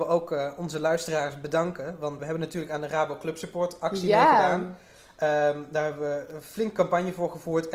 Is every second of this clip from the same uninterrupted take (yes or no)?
no